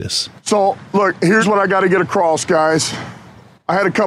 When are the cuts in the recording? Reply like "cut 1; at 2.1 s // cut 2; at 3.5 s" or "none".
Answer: none

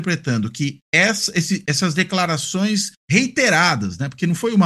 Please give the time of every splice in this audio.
cut 1; at 3.0 s

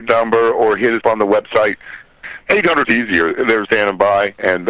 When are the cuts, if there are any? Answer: cut 1; at 1.0 s // cut 2; at 2.8 s // cut 3; at 3.6 s

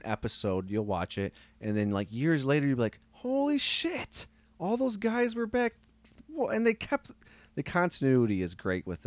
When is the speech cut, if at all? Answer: cut 1; at 3.0 s

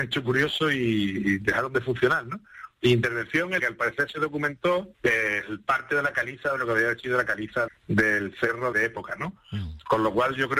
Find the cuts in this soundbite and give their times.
cut 1; at 3.6 s // cut 2; at 4.9 s // cut 3; at 7.7 s // cut 4; at 8.7 s

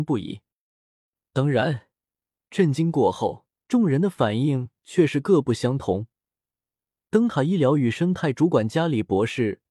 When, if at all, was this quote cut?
cut 1; at 3.5 s

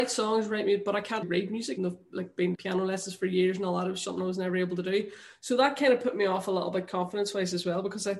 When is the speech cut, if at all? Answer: cut 1; at 1.2 s // cut 2; at 1.8 s // cut 3; at 2.5 s // cut 4; at 4.0 s

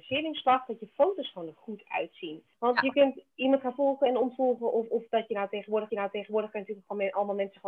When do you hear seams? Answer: cut 1; at 2.5 s // cut 2; at 5.9 s

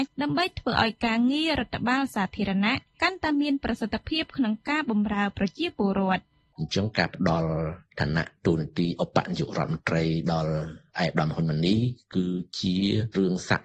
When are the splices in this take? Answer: none

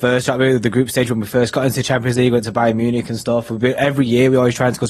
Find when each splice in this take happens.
none

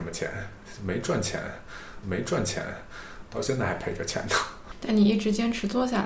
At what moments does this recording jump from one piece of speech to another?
cut 1; at 2.0 s

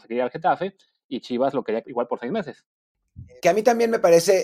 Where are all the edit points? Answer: cut 1; at 1.8 s

